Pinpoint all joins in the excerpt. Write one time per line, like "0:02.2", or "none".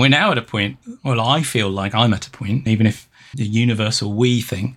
0:02.7
0:03.3

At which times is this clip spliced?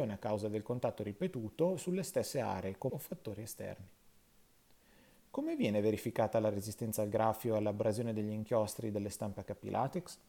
0:02.9

